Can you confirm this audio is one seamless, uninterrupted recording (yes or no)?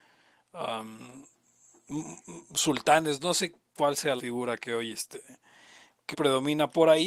no